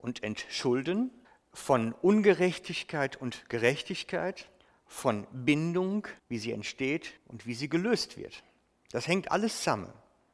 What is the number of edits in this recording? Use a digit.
4